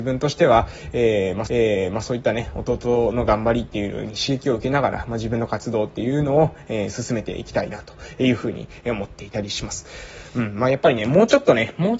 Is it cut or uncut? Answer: cut